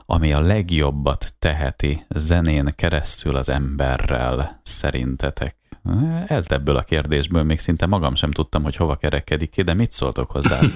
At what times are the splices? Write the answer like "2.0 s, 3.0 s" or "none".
6.5 s